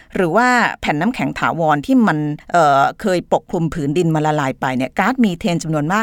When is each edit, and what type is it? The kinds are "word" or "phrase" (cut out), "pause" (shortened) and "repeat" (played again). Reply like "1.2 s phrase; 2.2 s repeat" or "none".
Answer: 2.4 s pause